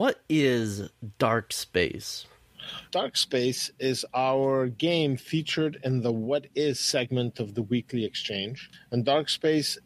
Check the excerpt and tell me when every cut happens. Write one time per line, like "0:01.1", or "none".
0:02.9

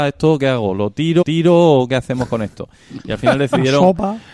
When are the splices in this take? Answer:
0:01.2

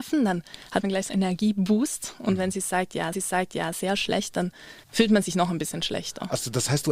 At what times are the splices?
0:01.1
0:03.1
0:04.8

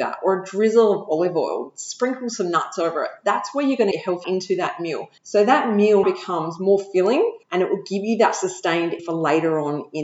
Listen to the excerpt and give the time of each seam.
0:03.9
0:04.2
0:05.2
0:06.0
0:07.4
0:09.0

